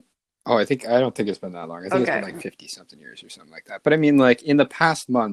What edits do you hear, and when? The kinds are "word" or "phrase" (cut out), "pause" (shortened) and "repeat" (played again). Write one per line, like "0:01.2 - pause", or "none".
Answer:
none